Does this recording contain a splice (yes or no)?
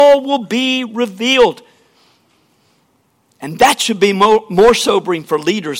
no